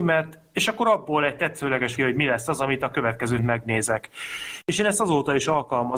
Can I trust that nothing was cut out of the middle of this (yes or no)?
no